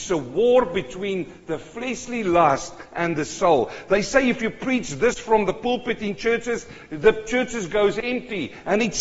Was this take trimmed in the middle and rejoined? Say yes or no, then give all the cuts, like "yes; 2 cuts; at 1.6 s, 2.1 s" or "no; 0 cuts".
no; 0 cuts